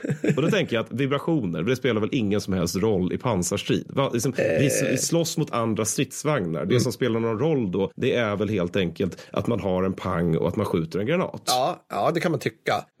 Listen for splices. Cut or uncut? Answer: uncut